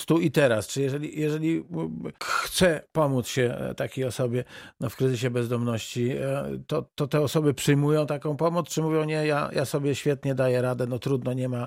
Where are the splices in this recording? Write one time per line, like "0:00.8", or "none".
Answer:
0:02.1

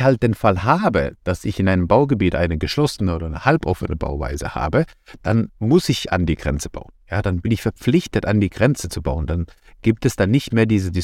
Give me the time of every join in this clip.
none

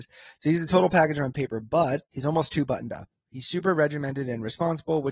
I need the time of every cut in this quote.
0:02.0

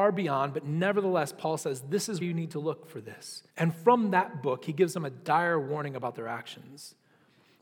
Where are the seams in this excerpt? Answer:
0:02.2
0:03.5

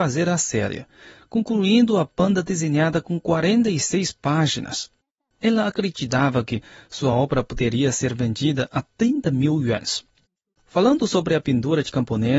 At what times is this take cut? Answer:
none

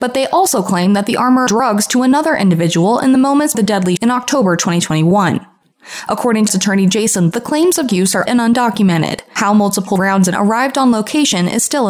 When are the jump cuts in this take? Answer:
0:01.5
0:03.5
0:04.0
0:06.5
0:07.3
0:07.9
0:08.3
0:10.0
0:10.3

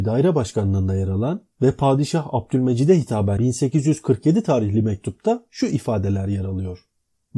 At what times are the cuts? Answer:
0:03.4

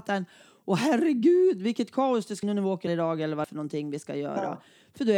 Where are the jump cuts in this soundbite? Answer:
0:02.4
0:02.9
0:03.4

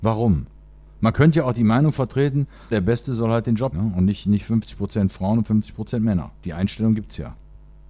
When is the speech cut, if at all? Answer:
0:02.7
0:03.7

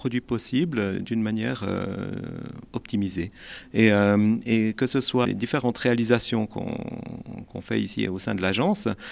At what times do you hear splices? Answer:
0:05.2

